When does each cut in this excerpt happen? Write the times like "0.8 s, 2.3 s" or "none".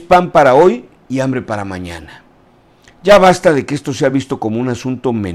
none